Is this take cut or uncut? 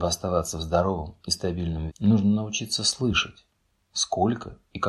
cut